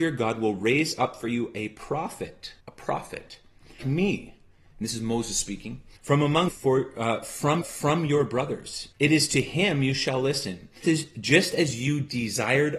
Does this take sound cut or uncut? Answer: cut